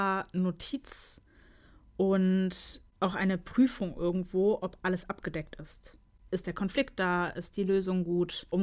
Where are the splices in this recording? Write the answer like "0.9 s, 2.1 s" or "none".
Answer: none